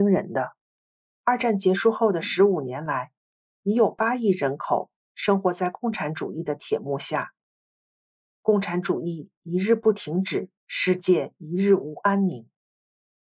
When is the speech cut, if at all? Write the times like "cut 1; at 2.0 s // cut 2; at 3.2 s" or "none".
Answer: cut 1; at 10.6 s